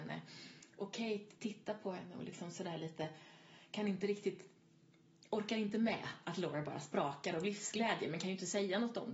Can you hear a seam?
no; 0 cuts

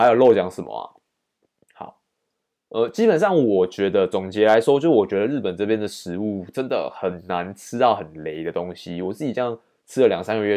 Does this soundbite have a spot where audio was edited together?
no; 0 cuts

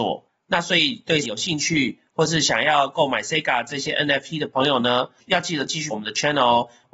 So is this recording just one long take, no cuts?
no; 2 cuts; at 1.2 s, 5.9 s

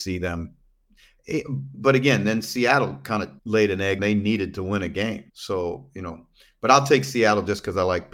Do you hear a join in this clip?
yes; 3 cuts; at 3.4 s, 4.0 s, 5.3 s

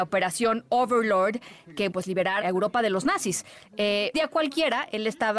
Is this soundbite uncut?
no; 3 cuts; at 1.9 s, 2.4 s, 4.1 s

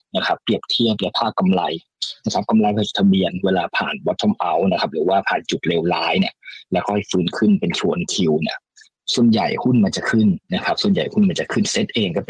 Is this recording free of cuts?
no; 1 cut; at 10.4 s

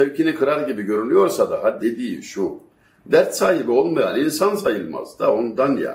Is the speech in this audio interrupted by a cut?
yes; 1 cut; at 1.8 s

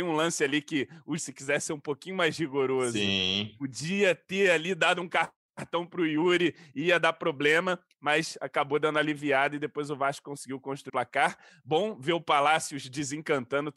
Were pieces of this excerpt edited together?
yes; 2 cuts; at 1.2 s, 10.9 s

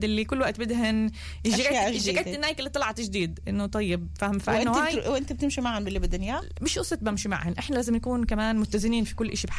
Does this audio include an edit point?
no; 0 cuts

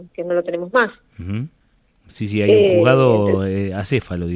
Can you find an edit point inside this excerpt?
no; 0 cuts

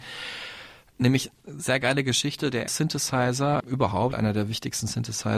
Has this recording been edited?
yes; 3 cuts; at 2.7 s, 3.6 s, 4.1 s

